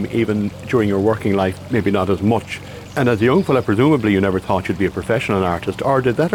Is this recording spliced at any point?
no; 0 cuts

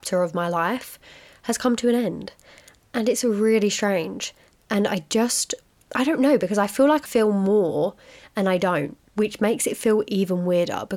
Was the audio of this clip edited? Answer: yes; 2 cuts; at 7.1 s, 9.1 s

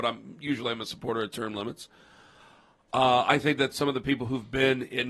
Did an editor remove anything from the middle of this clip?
no; 0 cuts

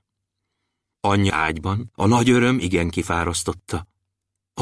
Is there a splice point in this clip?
yes; 2 cuts; at 1.3 s, 1.9 s

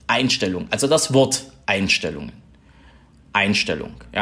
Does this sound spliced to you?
no; 0 cuts

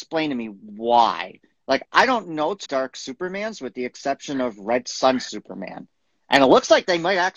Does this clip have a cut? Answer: yes; 1 cut; at 2.7 s

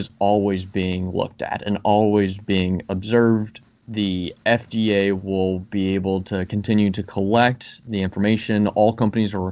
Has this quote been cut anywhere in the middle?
no; 0 cuts

